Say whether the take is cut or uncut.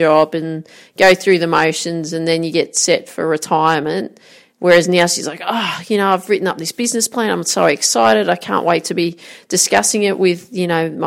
uncut